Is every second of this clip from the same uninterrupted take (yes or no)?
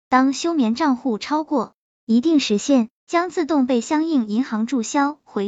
no